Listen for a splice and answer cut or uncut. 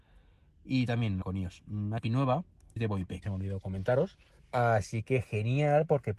cut